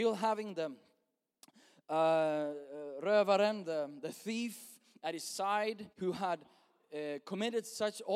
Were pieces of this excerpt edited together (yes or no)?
yes